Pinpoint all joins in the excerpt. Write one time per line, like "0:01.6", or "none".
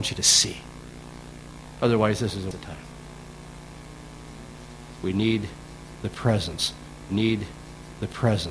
0:02.5
0:07.1